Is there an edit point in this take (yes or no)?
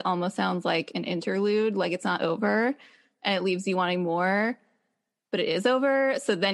no